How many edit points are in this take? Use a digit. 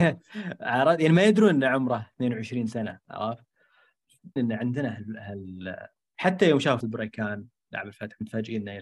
3